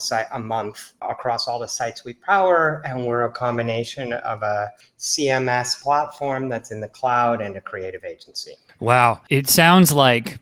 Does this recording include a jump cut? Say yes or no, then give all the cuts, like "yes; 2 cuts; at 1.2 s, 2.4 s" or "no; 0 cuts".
no; 0 cuts